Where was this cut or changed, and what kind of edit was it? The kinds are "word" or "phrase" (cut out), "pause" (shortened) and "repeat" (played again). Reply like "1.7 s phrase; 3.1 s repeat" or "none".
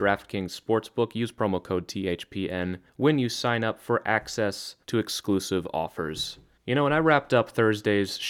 2.9 s pause; 4.8 s pause; 6.6 s pause